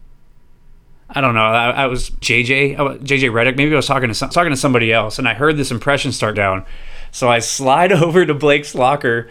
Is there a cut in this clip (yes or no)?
yes